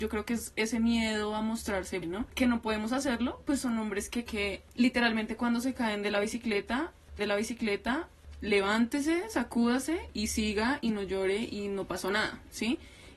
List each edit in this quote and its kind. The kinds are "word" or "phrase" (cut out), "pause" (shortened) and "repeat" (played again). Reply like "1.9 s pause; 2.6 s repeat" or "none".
2.0 s word; 4.3 s phrase; 7.2 s repeat

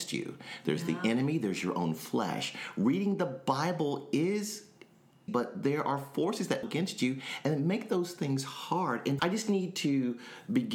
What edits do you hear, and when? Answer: 5.3 s word; 6.6 s word; 9.2 s word

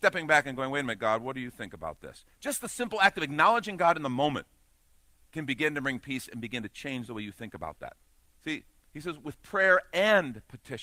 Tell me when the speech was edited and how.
none

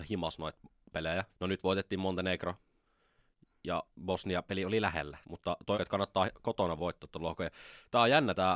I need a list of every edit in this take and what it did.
1.3 s pause; 3.9 s pause; 5.2 s pause; 5.7 s phrase; 6.8 s phrase

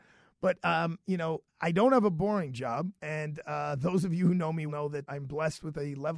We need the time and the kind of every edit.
1.5 s pause; 3.0 s pause; 4.7 s word; 5.1 s word

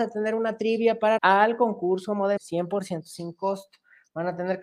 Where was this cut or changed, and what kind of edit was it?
1.2 s phrase; 2.4 s word

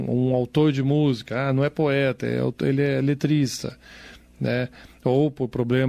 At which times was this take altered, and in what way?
none

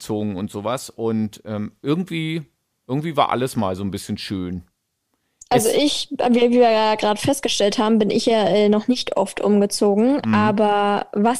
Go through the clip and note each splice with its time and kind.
none

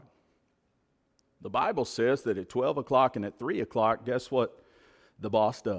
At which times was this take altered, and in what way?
none

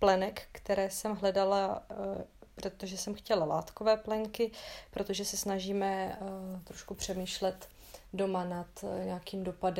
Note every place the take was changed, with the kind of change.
2.5 s pause

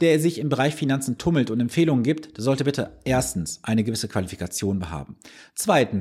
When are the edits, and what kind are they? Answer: none

